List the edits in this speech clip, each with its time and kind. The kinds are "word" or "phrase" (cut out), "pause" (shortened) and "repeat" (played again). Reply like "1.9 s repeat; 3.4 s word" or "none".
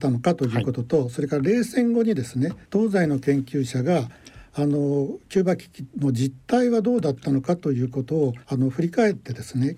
2.6 s pause; 8.4 s pause